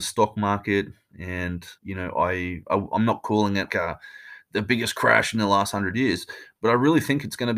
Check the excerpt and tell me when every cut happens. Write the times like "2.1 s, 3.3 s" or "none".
1.8 s, 3.7 s